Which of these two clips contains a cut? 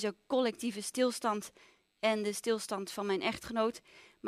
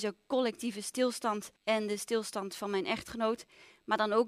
second; 1 cut; at 1.6 s

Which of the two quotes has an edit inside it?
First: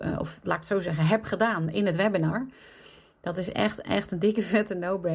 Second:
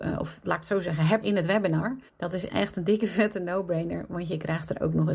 second; 3 cuts; at 1.2 s, 2.1 s, 2.5 s

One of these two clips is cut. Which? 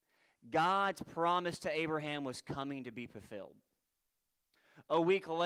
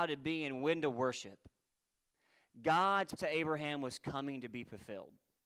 second; 1 cut; at 3.2 s

